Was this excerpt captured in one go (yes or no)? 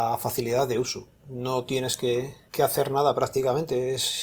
yes